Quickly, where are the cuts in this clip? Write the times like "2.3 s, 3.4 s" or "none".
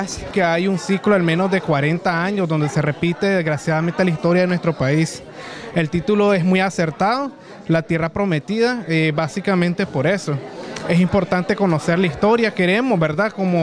none

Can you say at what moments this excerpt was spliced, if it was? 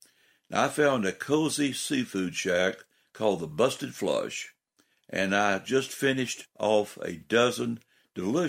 none

